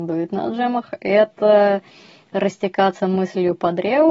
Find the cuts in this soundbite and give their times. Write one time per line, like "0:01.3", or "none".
none

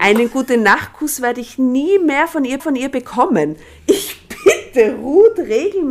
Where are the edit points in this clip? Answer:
0:02.6

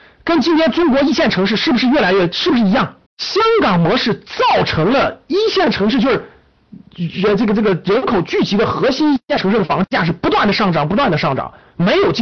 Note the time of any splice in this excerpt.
0:03.1

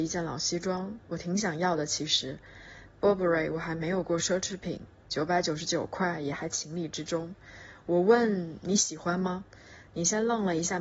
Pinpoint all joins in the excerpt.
0:01.0

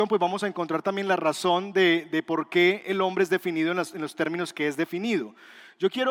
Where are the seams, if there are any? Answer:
none

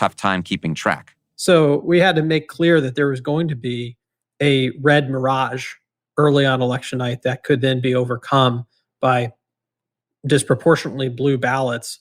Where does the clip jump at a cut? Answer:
none

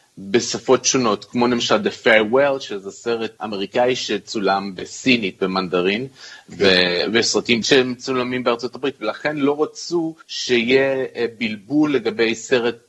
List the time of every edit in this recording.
0:03.4
0:07.6
0:10.2

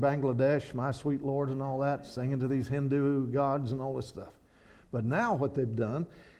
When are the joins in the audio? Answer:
none

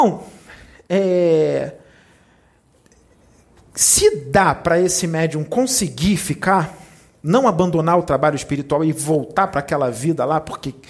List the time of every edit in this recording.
none

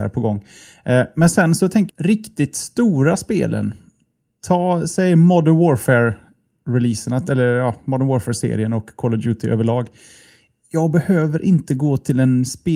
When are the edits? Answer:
0:01.9

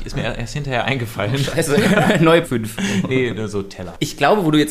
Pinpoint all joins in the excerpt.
0:02.4
0:03.1

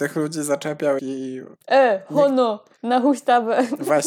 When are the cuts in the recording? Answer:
0:01.0
0:01.6

